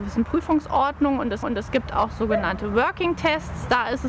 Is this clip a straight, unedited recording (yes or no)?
no